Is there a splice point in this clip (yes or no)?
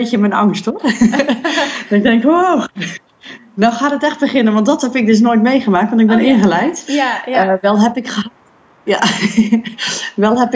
no